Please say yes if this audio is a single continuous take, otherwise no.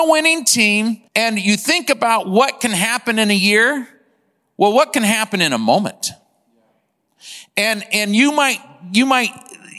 no